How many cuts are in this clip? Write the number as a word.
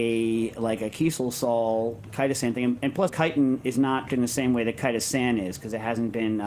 three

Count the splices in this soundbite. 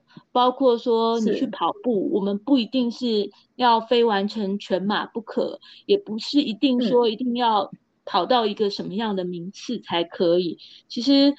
zero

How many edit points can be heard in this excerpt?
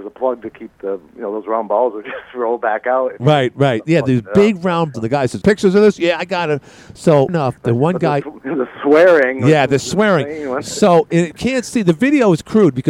four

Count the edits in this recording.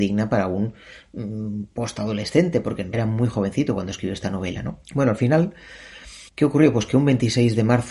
three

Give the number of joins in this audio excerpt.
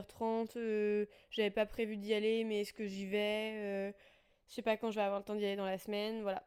zero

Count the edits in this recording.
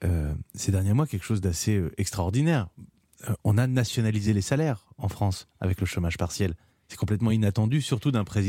zero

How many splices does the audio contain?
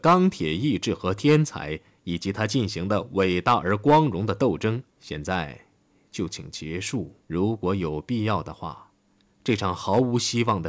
two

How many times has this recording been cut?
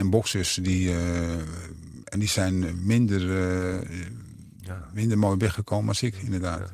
one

